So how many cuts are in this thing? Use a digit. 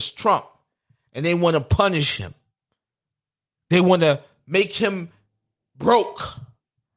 0